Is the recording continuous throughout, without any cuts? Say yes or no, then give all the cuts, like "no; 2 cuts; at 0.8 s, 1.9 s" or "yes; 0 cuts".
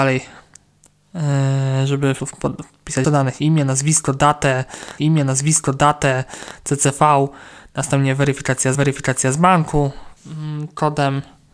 no; 5 cuts; at 2.2 s, 3.0 s, 5.0 s, 8.7 s, 10.2 s